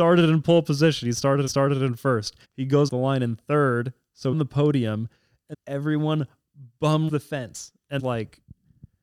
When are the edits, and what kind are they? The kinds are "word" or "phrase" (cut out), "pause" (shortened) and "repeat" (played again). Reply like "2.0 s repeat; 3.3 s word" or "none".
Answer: 1.5 s repeat; 2.4 s pause; 2.9 s word; 4.3 s phrase; 5.5 s word; 7.1 s word; 8.0 s phrase